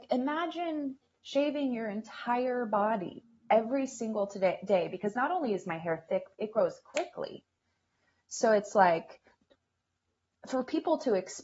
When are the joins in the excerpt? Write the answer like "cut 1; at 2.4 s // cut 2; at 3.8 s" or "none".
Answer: none